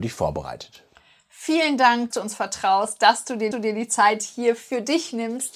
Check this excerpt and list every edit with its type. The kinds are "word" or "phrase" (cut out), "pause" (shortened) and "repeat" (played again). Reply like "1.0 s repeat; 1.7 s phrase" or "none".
2.1 s word; 3.5 s repeat